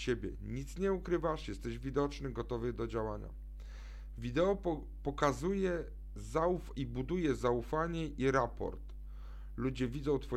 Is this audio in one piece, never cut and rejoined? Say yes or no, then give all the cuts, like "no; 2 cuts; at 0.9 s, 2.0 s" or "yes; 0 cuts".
yes; 0 cuts